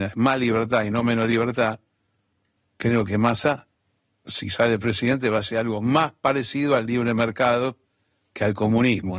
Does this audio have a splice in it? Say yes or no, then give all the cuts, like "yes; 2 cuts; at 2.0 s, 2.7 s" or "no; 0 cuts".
no; 0 cuts